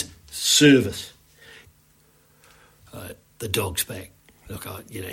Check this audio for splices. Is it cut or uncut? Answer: uncut